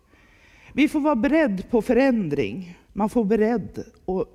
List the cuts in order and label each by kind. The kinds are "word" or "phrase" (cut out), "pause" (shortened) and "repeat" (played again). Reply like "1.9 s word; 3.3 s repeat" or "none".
2.8 s pause